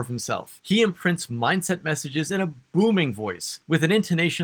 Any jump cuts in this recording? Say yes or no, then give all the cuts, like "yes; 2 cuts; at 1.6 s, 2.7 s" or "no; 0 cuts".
no; 0 cuts